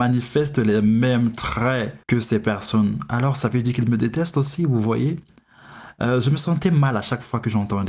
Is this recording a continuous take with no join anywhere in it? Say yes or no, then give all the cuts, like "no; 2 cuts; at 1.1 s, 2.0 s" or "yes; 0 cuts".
no; 1 cut; at 2.0 s